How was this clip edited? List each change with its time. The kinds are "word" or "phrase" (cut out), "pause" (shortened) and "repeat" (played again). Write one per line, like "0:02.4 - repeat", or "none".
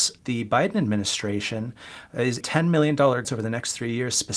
0:02.4 - word
0:03.2 - word